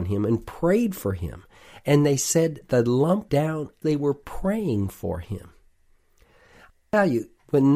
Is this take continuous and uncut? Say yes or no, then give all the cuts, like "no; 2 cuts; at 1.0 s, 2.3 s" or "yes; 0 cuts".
no; 2 cuts; at 3.3 s, 3.8 s